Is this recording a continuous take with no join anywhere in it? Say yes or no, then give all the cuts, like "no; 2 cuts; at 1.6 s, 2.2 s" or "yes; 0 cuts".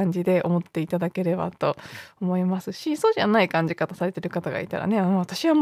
yes; 0 cuts